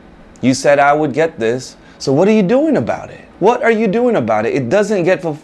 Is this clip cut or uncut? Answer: cut